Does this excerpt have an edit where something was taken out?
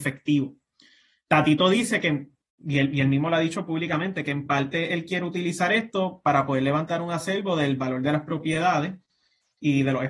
no; 0 cuts

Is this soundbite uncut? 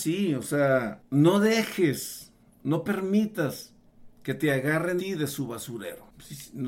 no; 1 cut; at 5.0 s

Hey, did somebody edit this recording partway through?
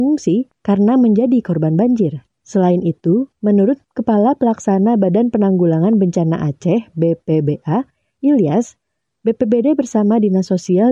no; 0 cuts

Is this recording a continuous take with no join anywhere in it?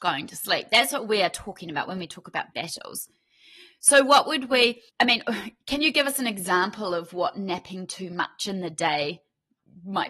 no; 2 cuts; at 2.5 s, 4.9 s

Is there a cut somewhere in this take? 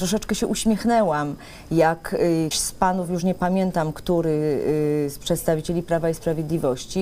yes; 1 cut; at 2.5 s

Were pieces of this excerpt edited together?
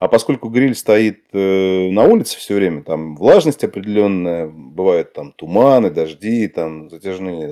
no; 0 cuts

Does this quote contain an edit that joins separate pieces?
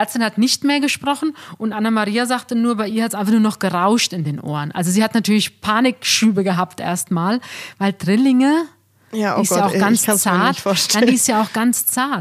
no; 0 cuts

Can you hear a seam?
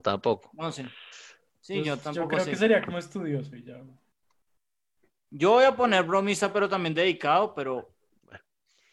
no; 0 cuts

